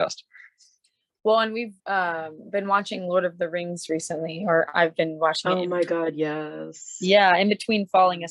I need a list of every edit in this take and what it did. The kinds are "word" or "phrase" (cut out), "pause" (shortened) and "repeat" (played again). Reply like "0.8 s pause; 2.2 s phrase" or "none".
1.8 s pause